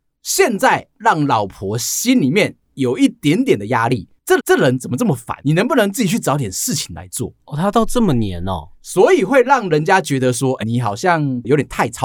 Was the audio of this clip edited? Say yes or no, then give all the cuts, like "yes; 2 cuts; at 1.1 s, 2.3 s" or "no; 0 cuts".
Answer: yes; 4 cuts; at 4.4 s, 5.4 s, 8.7 s, 10.6 s